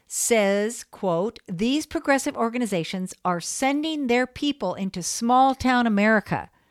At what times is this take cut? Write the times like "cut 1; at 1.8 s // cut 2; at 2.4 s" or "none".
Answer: none